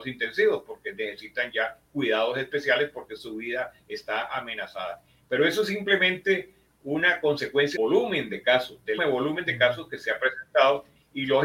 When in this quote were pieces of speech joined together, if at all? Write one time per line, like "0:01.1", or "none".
0:07.8
0:09.0

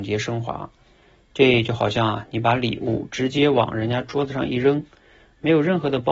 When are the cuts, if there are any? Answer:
none

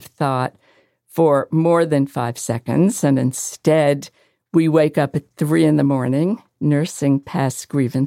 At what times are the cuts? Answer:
none

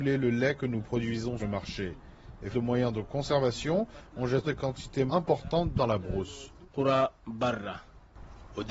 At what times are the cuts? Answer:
0:01.4
0:02.5
0:04.4
0:05.1
0:05.8

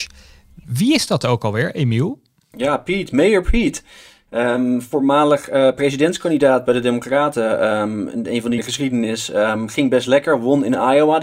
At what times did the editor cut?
0:08.6

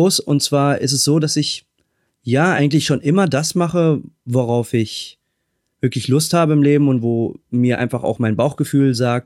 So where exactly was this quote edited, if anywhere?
none

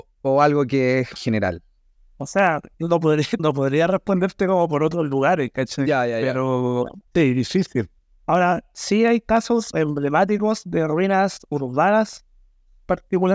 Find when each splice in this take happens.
0:01.2
0:02.7
0:03.4
0:07.1
0:08.0
0:09.7

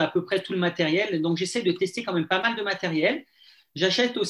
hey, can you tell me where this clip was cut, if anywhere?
none

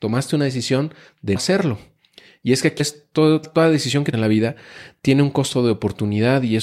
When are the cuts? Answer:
0:01.4
0:02.8
0:03.4
0:04.1

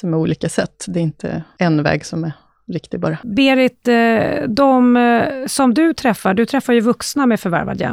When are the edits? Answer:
none

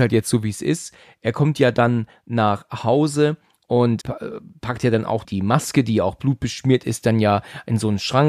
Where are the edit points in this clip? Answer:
0:04.0
0:05.2

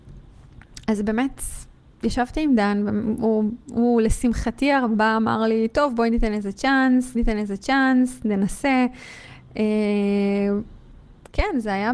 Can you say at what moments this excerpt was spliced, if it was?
0:07.1

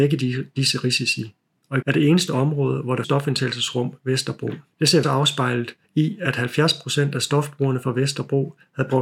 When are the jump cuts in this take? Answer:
0:01.8
0:03.0
0:04.7
0:05.0
0:05.8

